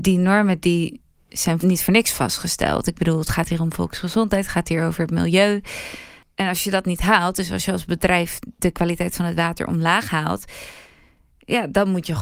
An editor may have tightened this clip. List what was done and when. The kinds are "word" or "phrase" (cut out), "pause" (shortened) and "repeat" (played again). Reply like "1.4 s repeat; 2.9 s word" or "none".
none